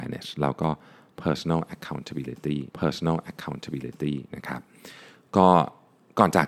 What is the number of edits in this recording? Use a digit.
1